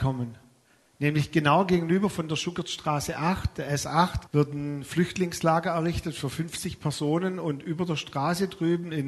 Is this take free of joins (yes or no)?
no